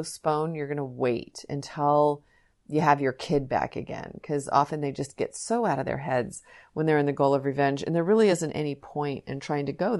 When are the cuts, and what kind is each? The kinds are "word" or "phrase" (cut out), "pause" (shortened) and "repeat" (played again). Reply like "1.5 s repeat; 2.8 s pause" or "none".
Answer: none

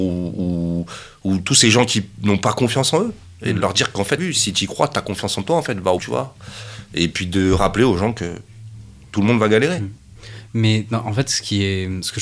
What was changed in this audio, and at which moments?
4.2 s word; 6.0 s word

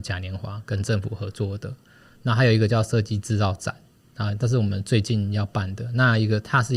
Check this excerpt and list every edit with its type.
none

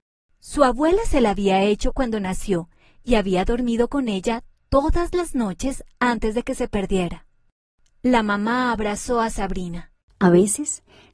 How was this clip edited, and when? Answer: none

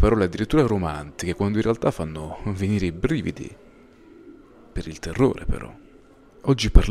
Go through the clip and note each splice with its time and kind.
none

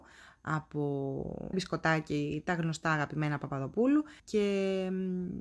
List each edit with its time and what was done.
1.5 s word; 4.2 s pause

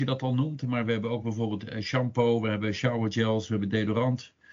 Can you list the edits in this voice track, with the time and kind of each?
none

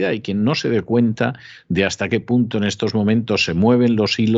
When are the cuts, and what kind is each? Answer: none

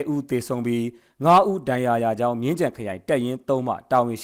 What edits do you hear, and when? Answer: none

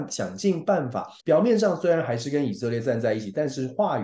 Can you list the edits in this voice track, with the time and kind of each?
1.2 s pause

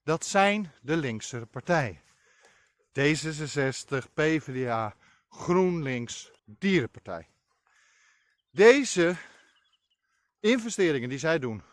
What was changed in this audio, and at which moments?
6.4 s pause

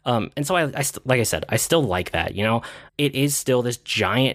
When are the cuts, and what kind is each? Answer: 2.9 s pause

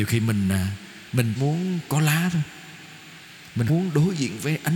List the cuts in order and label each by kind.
1.4 s word; 3.7 s word

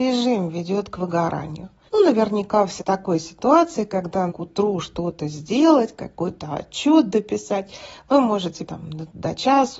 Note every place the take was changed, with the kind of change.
1.9 s pause; 2.8 s word; 4.3 s word; 8.7 s word

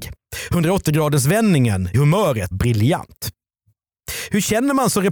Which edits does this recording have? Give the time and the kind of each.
1.9 s word; 2.5 s word

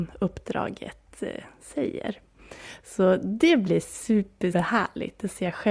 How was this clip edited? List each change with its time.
4.5 s word

